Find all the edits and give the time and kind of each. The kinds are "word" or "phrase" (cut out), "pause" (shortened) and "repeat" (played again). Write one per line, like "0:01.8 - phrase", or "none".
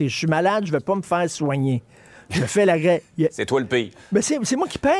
none